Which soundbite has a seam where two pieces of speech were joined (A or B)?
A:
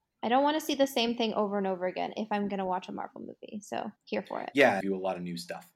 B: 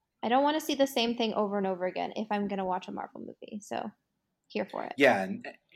A